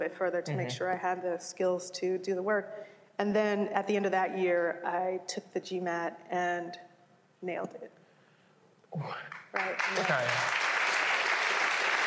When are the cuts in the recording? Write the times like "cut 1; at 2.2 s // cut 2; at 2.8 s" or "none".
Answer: none